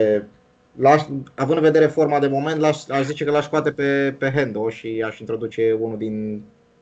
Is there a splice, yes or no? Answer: no